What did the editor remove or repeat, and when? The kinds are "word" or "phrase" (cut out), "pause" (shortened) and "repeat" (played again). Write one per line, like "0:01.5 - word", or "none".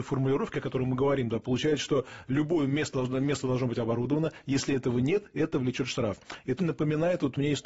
0:06.6 - word